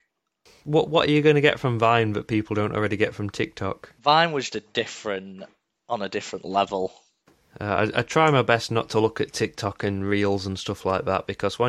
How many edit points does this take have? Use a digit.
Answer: 2